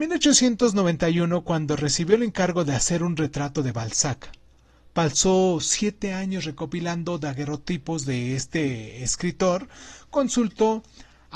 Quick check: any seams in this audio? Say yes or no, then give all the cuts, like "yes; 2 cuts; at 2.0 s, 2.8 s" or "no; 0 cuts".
no; 0 cuts